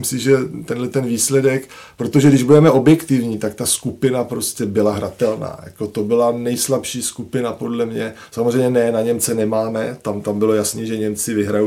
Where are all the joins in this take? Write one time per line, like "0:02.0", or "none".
none